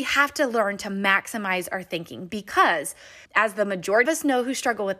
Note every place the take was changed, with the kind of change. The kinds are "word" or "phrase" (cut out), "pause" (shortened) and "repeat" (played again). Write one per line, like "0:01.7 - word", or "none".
0:03.2 - pause
0:04.0 - word